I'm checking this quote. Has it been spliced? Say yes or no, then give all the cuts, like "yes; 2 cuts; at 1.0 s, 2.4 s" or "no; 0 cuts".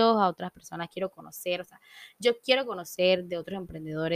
no; 0 cuts